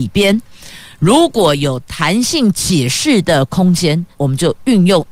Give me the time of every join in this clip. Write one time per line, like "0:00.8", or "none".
0:04.1